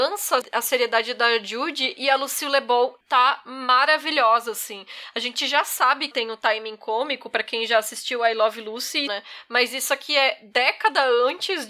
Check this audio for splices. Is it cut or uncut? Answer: cut